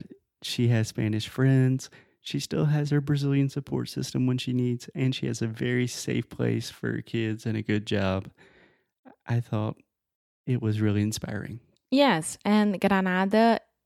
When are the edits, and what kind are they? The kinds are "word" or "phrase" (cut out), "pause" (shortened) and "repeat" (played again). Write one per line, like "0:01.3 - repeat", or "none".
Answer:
none